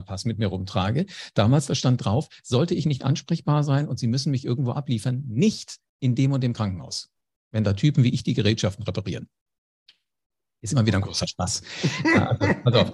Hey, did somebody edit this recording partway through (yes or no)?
no